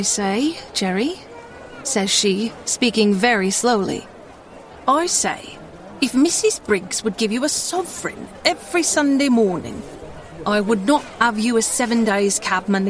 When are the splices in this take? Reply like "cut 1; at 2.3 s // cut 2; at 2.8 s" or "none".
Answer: none